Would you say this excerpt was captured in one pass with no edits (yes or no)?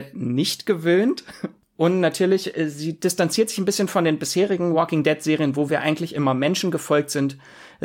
yes